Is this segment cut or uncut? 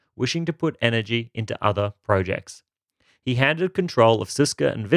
uncut